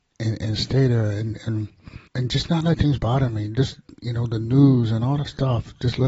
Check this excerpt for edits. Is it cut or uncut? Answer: cut